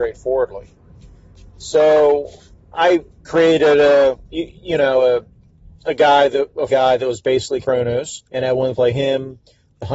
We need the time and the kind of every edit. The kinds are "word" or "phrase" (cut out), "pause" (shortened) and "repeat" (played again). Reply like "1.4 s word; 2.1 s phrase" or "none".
3.1 s pause; 4.2 s pause; 6.7 s phrase; 7.6 s word; 8.3 s pause; 8.7 s phrase

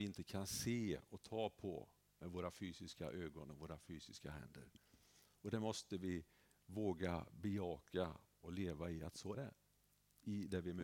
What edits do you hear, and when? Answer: 9.3 s word

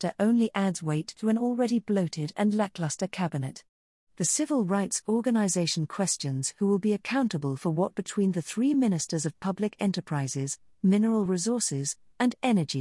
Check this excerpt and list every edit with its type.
none

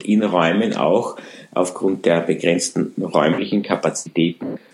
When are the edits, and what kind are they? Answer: none

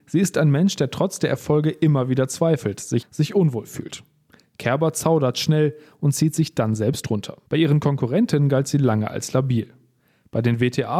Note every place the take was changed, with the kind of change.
3.0 s word; 7.5 s pause

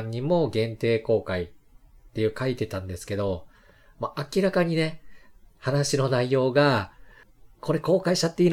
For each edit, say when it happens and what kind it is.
none

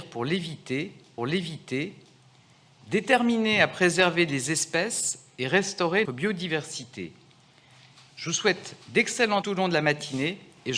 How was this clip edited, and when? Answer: 1.2 s repeat; 6.0 s word; 9.4 s phrase

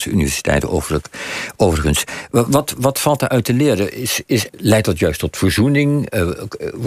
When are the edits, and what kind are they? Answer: 2.8 s word; 4.5 s word

